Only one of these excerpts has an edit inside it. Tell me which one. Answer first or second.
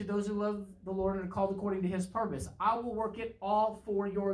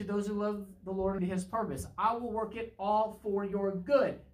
second